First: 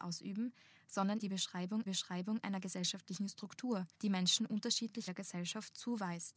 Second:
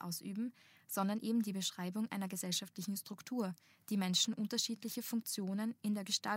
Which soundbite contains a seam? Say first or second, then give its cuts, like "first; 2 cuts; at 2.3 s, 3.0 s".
first; 4 cuts; at 1.2 s, 1.9 s, 3.9 s, 5.1 s